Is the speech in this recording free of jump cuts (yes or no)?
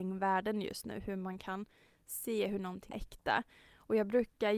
no